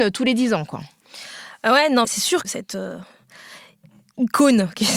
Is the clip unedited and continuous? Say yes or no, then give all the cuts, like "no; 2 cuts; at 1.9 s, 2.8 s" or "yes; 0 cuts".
no; 2 cuts; at 2.0 s, 2.4 s